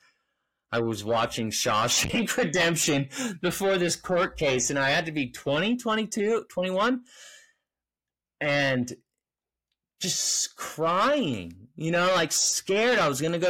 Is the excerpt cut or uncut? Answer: uncut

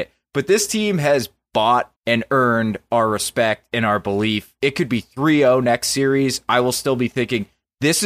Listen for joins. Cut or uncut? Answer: cut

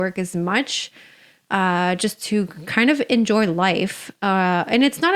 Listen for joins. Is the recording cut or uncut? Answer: uncut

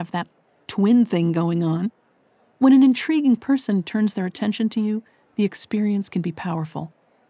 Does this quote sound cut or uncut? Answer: uncut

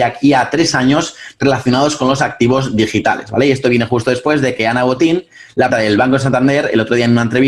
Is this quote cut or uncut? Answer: cut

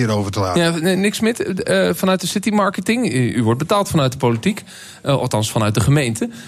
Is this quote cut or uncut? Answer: uncut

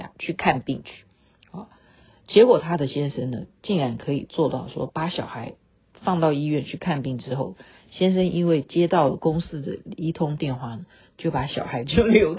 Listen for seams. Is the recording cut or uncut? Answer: uncut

